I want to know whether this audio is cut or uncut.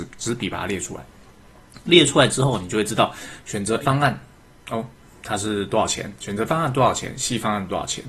cut